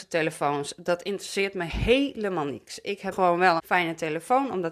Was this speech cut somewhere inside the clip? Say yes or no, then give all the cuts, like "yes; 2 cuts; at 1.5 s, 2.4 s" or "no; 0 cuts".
yes; 2 cuts; at 3.1 s, 3.6 s